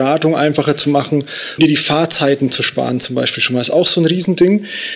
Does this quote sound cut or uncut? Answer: cut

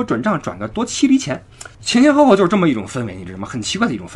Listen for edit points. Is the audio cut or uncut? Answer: cut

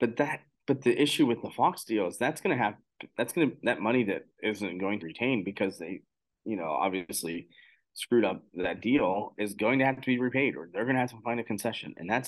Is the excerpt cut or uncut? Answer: cut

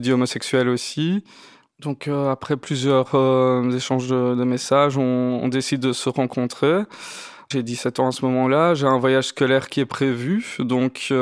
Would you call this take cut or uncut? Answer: uncut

